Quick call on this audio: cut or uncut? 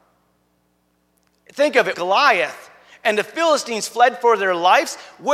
cut